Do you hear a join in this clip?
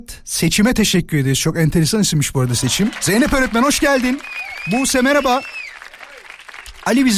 no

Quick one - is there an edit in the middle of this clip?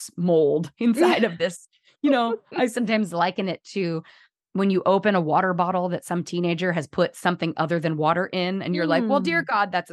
no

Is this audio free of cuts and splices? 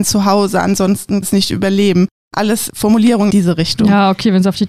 no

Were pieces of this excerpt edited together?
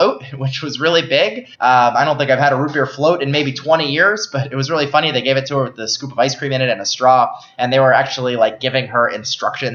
yes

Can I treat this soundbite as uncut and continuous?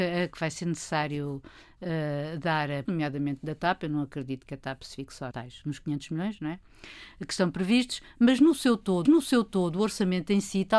no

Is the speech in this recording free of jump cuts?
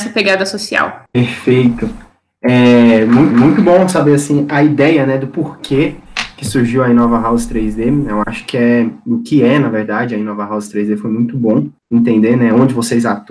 no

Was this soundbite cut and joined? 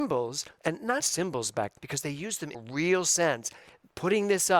yes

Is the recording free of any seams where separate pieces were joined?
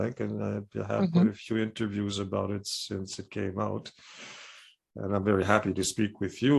yes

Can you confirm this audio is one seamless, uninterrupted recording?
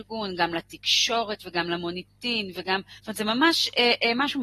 no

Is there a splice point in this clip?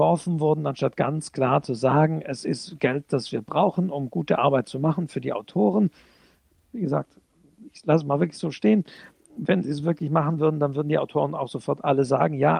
no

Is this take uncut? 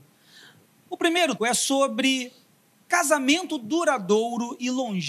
no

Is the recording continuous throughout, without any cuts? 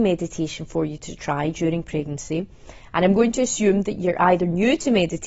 yes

